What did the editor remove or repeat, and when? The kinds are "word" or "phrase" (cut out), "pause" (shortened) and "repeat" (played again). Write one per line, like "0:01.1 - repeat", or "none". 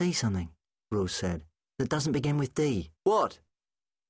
0:01.6 - pause
0:03.0 - pause

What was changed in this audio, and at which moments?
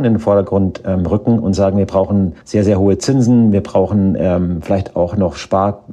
0:02.4 - pause

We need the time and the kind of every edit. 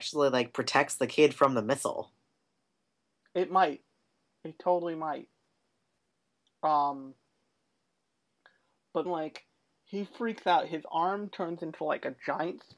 0:09.1 - word

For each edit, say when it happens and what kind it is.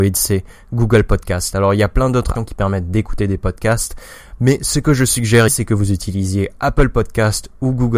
0:02.3 - word
0:05.5 - word

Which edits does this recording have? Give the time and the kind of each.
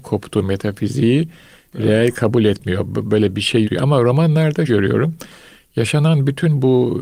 0:03.6 - word
0:04.7 - word

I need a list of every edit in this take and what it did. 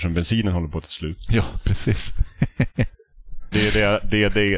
0:03.5 - word

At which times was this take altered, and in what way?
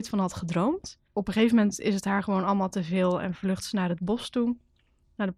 0:01.1 - pause

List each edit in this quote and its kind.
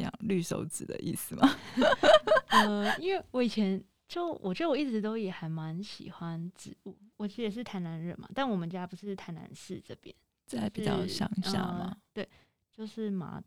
none

